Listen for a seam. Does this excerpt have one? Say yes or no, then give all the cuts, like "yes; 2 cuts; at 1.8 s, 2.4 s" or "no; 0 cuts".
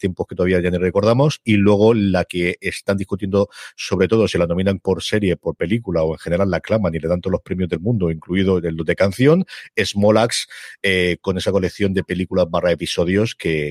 no; 0 cuts